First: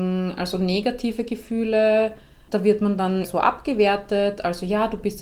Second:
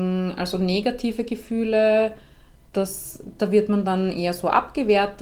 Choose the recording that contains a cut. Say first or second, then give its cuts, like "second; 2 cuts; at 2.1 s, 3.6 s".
first; 2 cuts; at 2.5 s, 3.2 s